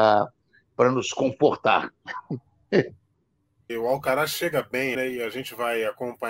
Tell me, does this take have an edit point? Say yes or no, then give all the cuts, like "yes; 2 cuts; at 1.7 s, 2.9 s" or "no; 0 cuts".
yes; 2 cuts; at 3.7 s, 4.9 s